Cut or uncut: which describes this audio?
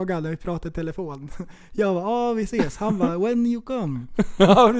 uncut